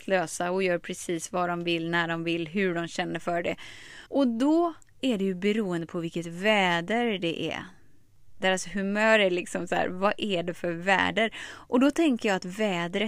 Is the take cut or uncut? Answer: cut